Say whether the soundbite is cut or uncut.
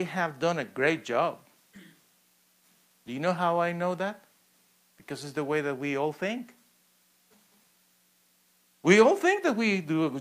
uncut